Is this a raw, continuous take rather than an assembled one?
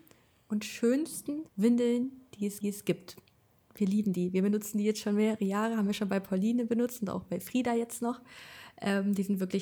no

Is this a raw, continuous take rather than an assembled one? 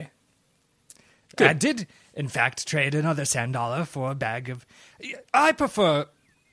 yes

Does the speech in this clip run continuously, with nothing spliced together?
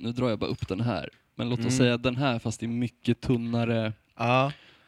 yes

